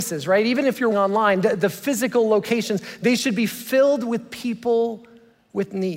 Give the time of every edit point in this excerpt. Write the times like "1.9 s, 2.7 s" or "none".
0.9 s